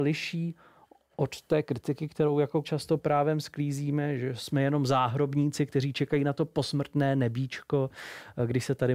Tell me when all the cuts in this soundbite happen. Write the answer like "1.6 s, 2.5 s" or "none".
2.6 s